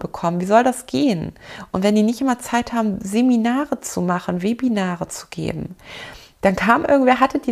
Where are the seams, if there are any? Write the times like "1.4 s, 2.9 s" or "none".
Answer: none